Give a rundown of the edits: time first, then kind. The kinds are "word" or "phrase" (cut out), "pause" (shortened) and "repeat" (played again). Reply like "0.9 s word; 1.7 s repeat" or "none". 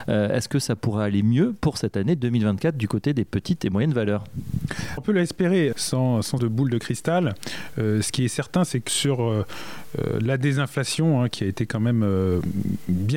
5.0 s word; 5.7 s word; 6.4 s word; 8.9 s word